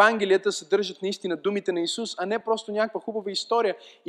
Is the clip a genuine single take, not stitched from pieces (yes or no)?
yes